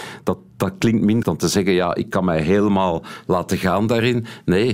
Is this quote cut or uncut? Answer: cut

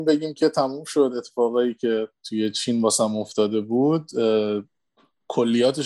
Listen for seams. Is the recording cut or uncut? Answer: uncut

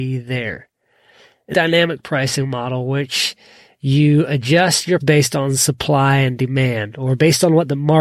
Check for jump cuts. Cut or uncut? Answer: cut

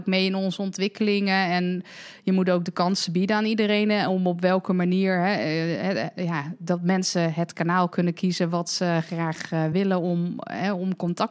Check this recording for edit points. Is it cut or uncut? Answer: uncut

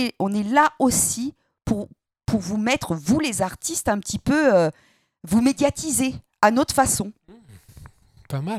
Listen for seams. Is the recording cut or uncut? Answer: uncut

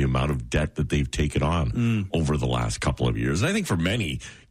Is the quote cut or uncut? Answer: uncut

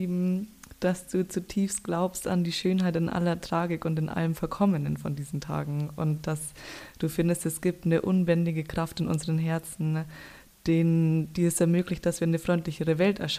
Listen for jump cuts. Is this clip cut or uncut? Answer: uncut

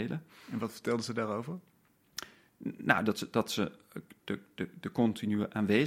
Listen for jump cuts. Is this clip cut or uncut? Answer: uncut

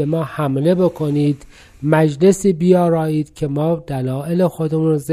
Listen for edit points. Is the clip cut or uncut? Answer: uncut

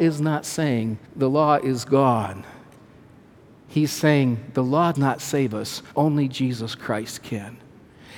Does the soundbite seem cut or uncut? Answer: cut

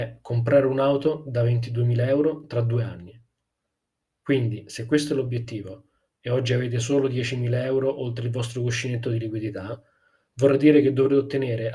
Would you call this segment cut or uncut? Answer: uncut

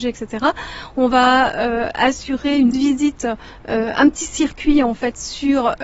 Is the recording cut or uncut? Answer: cut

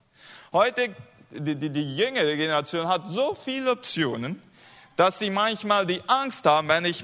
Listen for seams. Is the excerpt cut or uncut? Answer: uncut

